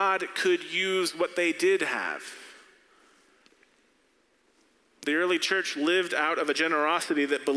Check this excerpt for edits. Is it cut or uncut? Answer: uncut